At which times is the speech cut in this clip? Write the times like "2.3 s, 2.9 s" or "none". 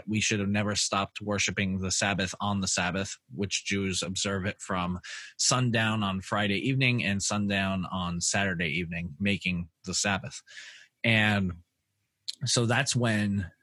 none